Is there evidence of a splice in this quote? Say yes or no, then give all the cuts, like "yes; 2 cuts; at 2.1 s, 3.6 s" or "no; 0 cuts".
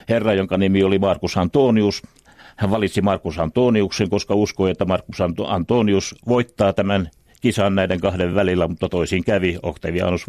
no; 0 cuts